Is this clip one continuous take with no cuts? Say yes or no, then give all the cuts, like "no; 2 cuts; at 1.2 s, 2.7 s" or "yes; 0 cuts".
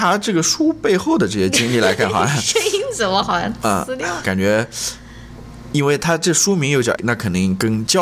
no; 2 cuts; at 4.2 s, 7.0 s